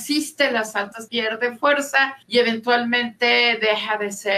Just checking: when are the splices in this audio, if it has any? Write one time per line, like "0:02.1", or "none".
0:01.1
0:02.2